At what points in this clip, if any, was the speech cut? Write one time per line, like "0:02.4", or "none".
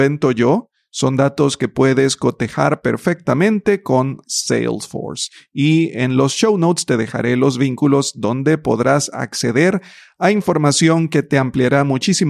none